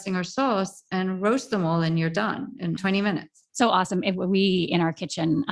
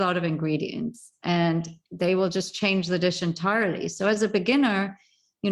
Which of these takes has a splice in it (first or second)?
first